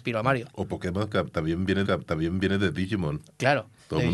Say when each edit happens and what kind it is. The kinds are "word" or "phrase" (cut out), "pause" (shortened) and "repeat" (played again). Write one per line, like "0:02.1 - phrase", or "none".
0:01.8 - repeat